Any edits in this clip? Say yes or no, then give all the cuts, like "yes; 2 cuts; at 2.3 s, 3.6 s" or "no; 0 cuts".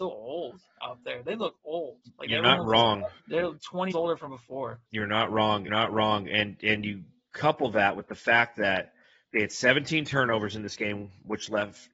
yes; 5 cuts; at 3.2 s, 3.9 s, 4.3 s, 4.9 s, 5.7 s